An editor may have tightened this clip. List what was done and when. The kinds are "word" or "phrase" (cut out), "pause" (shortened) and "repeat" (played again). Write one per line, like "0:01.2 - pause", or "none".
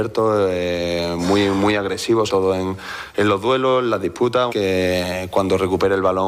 0:02.3 - word
0:04.5 - phrase

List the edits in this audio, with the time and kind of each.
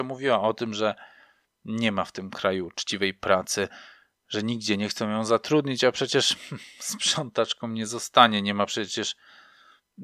none

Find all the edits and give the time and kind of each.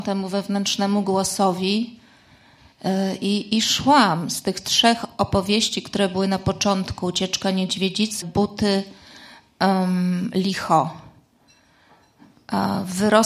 0:08.2 - word

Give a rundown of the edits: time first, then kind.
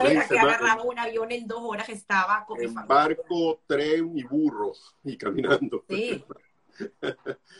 none

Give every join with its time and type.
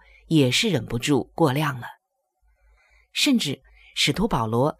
none

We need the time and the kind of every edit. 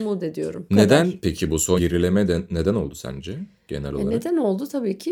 0:01.8 - word

